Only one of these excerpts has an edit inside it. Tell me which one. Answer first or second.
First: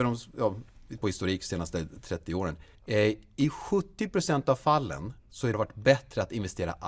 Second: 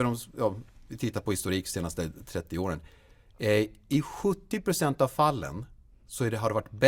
first